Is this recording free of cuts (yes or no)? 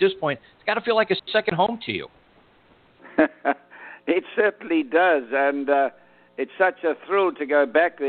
yes